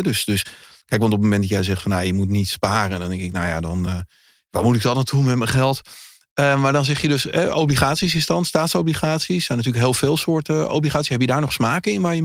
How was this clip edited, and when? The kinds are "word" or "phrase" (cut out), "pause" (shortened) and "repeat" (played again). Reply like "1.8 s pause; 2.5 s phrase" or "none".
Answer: none